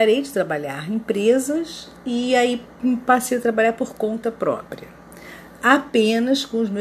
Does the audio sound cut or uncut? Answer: uncut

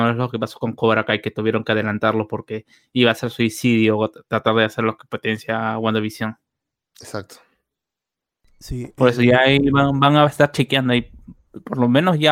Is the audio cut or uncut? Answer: uncut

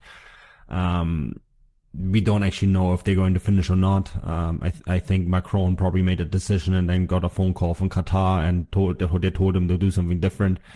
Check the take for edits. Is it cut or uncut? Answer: uncut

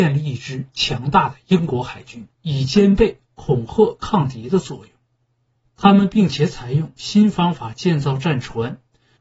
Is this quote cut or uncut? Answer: cut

